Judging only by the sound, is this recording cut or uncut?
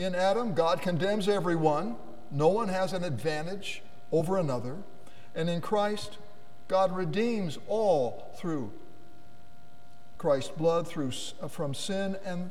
uncut